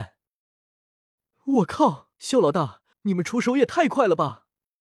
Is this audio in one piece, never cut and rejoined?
no; 2 cuts; at 2.1 s, 2.9 s

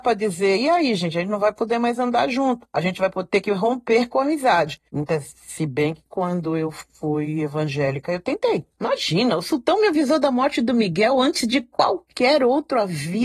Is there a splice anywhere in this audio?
yes; 1 cut; at 4.9 s

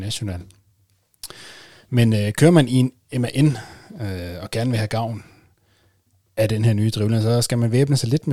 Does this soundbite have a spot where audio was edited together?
no; 0 cuts

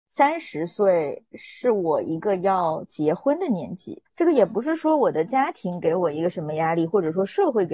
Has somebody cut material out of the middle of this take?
yes; 1 cut; at 4.1 s

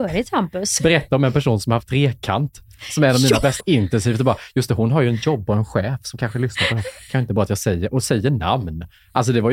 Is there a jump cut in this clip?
yes; 1 cut; at 3.6 s

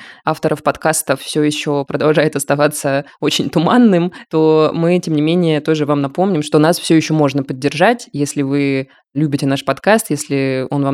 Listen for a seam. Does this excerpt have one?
no; 0 cuts

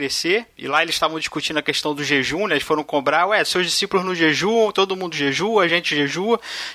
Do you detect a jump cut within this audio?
no; 0 cuts

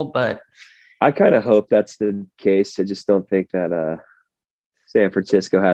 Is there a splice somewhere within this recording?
no; 0 cuts

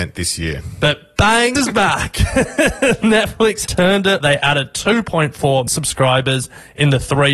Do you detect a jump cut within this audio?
yes; 4 cuts; at 1.5 s, 3.7 s, 4.2 s, 5.7 s

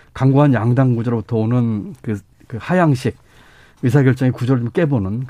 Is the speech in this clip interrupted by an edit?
no; 0 cuts

